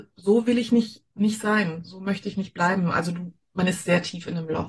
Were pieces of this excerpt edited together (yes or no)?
no